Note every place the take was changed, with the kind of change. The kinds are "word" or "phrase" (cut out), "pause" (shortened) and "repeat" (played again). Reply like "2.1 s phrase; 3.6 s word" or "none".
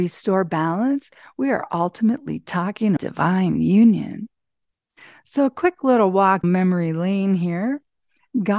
3.0 s word; 6.4 s word

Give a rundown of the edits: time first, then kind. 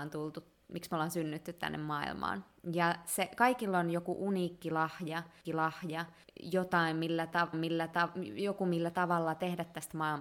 5.4 s repeat; 7.5 s repeat

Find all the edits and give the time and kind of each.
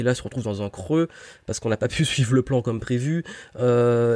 none

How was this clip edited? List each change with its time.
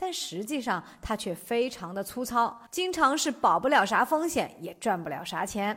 2.7 s pause

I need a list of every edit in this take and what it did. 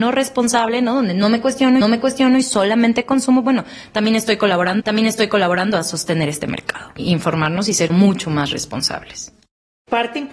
1.8 s repeat; 4.8 s repeat; 7.9 s word

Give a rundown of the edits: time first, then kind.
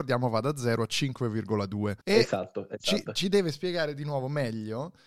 2.0 s pause

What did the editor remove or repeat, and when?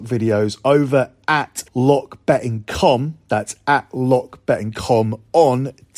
1.7 s pause

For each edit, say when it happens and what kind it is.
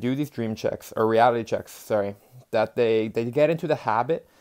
none

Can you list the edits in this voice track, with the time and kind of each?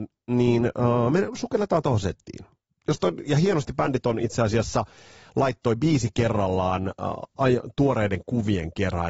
none

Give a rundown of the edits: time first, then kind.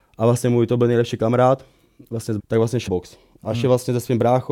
2.4 s word; 2.9 s word

